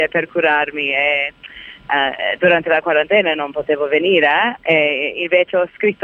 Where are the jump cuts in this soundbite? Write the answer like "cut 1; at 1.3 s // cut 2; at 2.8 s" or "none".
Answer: none